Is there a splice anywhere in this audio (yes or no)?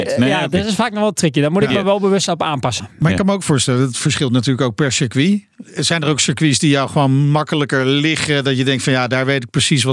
no